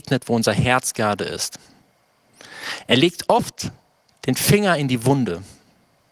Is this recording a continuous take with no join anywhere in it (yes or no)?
yes